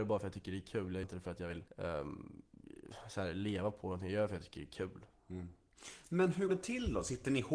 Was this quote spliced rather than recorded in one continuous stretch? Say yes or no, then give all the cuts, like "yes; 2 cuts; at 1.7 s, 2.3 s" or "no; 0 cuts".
yes; 3 cuts; at 1.0 s, 1.7 s, 6.5 s